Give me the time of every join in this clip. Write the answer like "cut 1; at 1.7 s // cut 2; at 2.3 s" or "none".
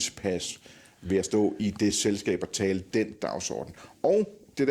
none